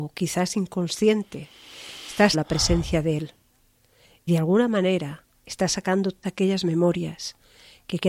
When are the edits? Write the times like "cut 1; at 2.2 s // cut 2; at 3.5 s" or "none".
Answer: cut 1; at 2.3 s // cut 2; at 4.3 s // cut 3; at 6.2 s